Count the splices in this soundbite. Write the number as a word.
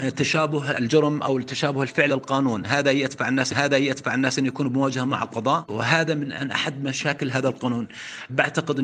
two